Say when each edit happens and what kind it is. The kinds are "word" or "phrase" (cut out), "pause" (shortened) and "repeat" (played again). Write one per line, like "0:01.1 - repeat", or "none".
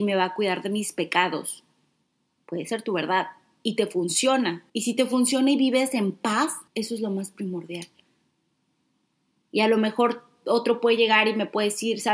0:04.7 - pause
0:06.7 - pause